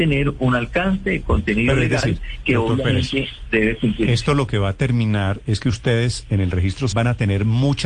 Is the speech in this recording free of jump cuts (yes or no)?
no